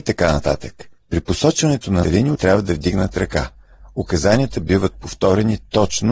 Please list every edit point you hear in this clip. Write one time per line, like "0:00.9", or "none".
0:01.0
0:02.0
0:02.3